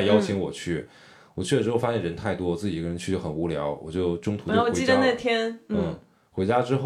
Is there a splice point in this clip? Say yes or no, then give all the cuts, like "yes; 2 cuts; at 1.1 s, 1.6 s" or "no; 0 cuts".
no; 0 cuts